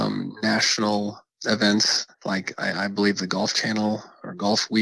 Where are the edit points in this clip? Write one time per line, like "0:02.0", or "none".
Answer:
0:02.1